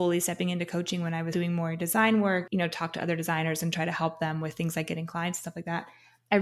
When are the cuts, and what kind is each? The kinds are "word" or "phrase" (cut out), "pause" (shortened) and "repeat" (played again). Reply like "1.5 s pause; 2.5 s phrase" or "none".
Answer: 1.3 s word; 2.5 s phrase